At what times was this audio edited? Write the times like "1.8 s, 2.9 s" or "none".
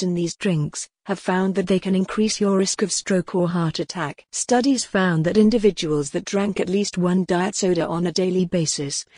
4.3 s

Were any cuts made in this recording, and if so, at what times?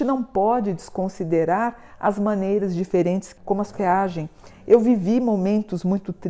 3.4 s, 3.7 s

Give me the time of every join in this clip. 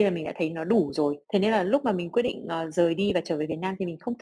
1.2 s

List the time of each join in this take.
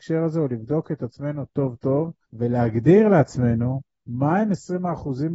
2.3 s

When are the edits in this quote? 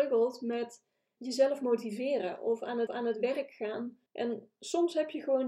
1.2 s, 2.9 s, 4.1 s

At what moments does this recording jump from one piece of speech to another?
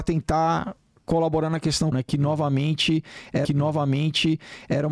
1.9 s, 3.4 s

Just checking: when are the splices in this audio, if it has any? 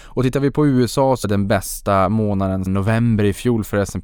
1.2 s, 2.7 s

